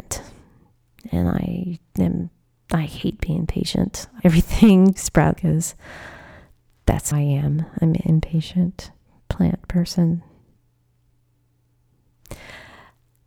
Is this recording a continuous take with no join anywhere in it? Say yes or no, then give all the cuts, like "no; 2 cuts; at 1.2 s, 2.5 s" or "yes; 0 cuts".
no; 4 cuts; at 4.2 s, 5.0 s, 5.4 s, 7.1 s